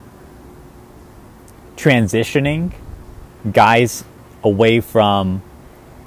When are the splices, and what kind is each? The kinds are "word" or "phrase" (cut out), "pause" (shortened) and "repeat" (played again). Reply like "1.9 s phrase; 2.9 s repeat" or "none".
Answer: none